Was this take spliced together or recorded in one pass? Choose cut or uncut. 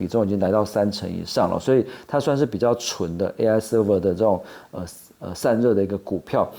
uncut